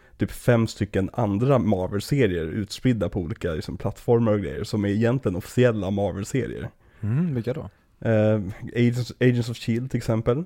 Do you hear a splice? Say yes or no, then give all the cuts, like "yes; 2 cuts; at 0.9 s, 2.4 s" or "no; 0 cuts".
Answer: no; 0 cuts